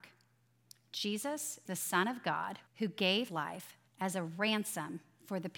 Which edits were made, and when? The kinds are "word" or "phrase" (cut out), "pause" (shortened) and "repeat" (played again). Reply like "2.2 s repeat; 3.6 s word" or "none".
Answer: 1.7 s word; 2.7 s pause; 3.3 s word; 3.9 s pause